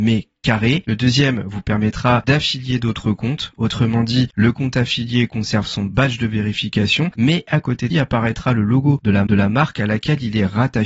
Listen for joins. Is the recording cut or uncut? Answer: cut